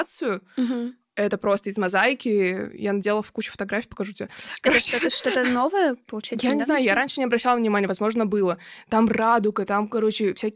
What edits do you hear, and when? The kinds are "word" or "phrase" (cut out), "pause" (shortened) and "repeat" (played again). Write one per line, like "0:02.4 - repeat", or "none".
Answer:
none

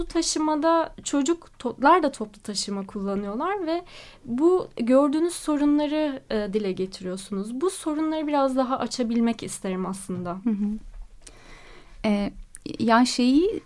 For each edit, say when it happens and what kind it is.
none

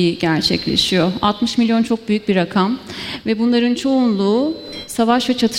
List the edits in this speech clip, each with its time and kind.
none

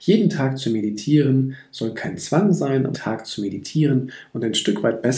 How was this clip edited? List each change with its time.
0:02.9 - word

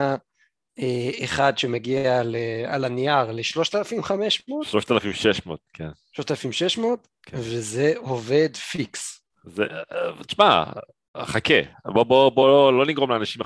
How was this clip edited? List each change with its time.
none

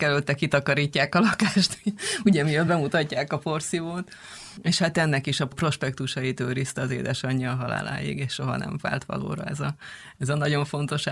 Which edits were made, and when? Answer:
none

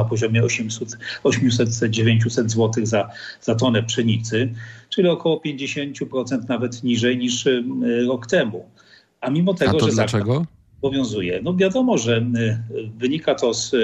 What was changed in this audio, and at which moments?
none

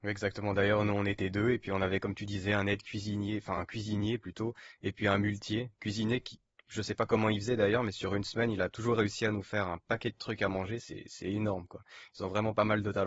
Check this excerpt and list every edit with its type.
none

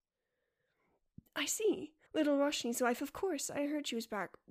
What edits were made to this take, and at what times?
0:01.3 - pause
0:02.1 - pause

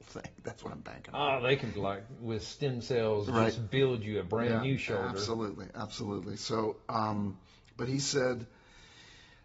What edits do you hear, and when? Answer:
0:01.8 - word

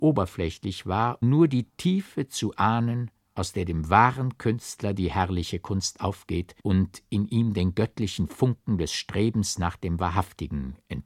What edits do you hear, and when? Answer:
0:01.2 - word
0:03.2 - pause
0:06.6 - pause

